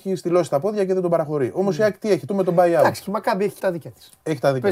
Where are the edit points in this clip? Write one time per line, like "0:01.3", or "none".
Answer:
0:02.3
0:03.6